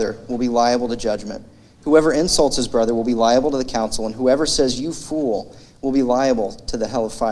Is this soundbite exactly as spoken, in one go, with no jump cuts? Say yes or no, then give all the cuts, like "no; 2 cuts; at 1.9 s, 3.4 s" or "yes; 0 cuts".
yes; 0 cuts